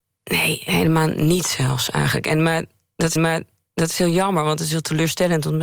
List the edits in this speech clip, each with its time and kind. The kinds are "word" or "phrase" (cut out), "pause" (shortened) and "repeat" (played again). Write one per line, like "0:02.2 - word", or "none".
0:03.2 - repeat